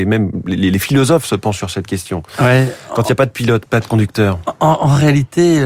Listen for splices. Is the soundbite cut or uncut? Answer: uncut